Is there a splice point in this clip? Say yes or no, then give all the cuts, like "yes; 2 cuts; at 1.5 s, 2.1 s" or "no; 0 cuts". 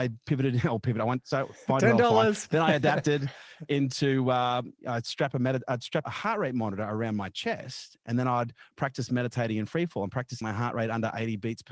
yes; 3 cuts; at 4.8 s, 6.0 s, 10.4 s